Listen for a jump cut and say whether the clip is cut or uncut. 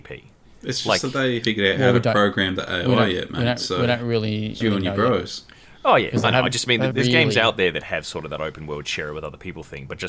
cut